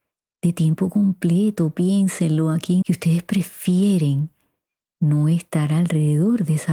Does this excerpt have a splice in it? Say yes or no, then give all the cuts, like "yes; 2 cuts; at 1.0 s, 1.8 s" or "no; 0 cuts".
yes; 1 cut; at 2.8 s